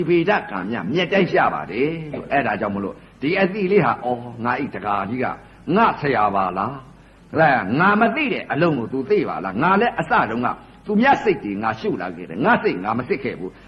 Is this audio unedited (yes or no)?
yes